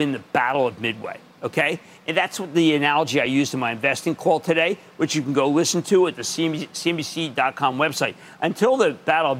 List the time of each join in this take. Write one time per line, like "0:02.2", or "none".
none